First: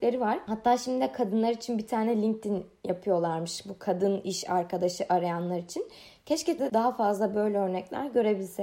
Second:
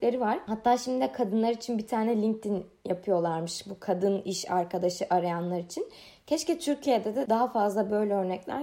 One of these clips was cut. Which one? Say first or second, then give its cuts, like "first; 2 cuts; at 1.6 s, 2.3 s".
first; 1 cut; at 6.6 s